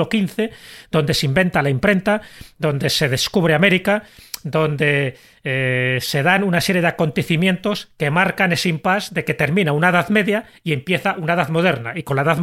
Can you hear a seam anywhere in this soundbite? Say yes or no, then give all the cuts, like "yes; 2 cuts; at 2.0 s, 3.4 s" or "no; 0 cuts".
no; 0 cuts